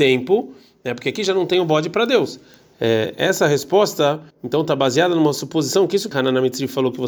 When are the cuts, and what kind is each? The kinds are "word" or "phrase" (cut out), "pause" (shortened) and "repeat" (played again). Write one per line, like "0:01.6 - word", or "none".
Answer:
0:04.3 - pause
0:06.1 - word